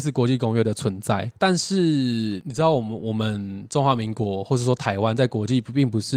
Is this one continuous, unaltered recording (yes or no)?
no